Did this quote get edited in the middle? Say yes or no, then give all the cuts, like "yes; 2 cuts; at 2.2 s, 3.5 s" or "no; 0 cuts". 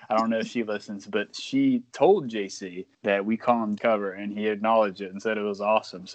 yes; 2 cuts; at 2.9 s, 3.8 s